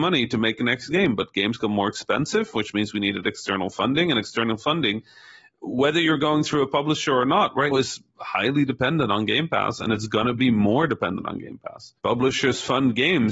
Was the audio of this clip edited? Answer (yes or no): yes